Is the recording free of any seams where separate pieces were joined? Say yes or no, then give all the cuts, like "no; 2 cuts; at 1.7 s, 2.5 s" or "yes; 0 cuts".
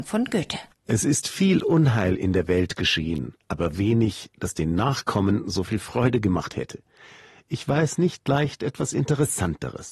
yes; 0 cuts